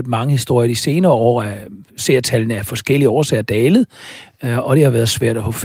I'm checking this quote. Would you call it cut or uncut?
uncut